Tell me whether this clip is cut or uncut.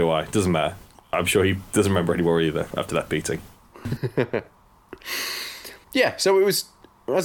cut